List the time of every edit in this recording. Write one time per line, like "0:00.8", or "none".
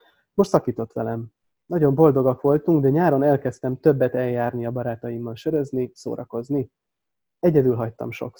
none